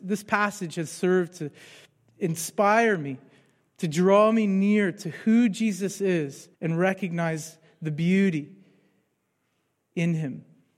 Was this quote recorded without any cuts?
no; 1 cut; at 6.5 s

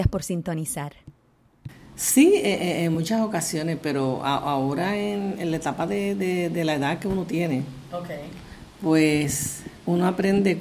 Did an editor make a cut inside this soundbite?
no; 0 cuts

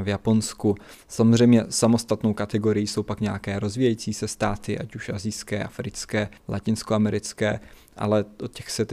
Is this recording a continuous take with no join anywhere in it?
no; 1 cut; at 6.4 s

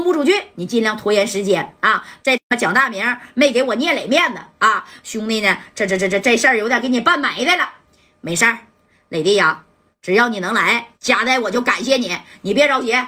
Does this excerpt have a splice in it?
no; 0 cuts

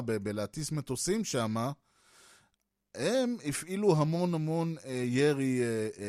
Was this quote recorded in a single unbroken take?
yes; 0 cuts

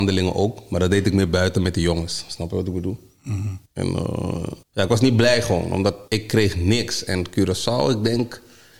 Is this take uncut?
no; 3 cuts; at 3.7 s, 4.6 s, 6.1 s

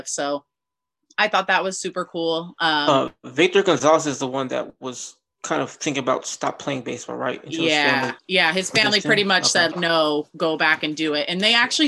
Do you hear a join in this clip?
yes; 2 cuts; at 8.2 s, 9.7 s

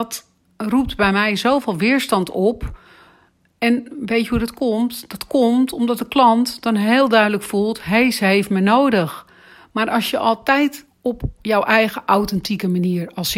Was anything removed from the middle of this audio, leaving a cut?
no; 0 cuts

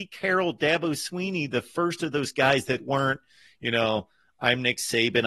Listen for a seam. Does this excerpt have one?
no; 0 cuts

